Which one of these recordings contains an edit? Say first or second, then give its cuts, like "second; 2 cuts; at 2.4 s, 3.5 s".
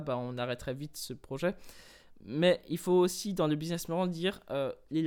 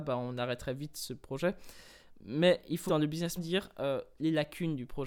second; 2 cuts; at 2.9 s, 3.4 s